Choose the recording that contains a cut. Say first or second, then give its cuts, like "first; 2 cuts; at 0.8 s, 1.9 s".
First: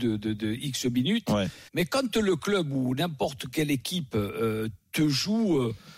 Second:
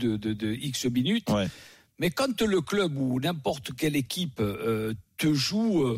first; 1 cut; at 1.7 s